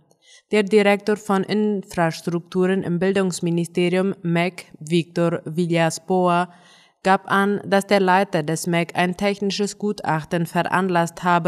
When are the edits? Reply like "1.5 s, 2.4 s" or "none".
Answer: none